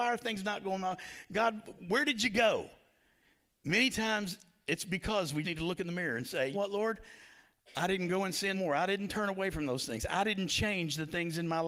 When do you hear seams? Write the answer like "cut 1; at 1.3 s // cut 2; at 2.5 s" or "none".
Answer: cut 1; at 5.4 s // cut 2; at 6.5 s // cut 3; at 8.5 s